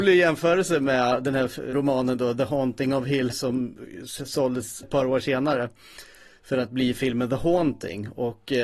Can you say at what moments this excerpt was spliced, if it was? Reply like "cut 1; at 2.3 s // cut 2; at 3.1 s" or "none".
cut 1; at 1.7 s // cut 2; at 3.3 s // cut 3; at 4.8 s